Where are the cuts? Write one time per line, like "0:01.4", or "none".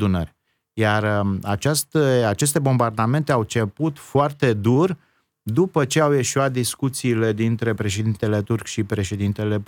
none